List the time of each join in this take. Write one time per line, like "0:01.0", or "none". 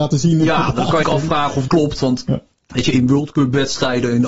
0:01.0
0:01.7
0:02.5